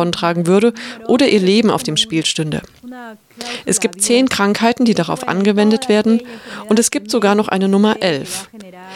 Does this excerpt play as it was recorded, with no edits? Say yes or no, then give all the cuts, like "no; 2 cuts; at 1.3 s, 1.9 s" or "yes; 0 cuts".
yes; 0 cuts